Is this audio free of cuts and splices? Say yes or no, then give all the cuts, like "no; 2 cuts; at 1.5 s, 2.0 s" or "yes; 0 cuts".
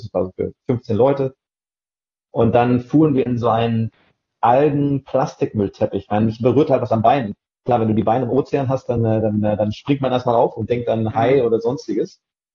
yes; 0 cuts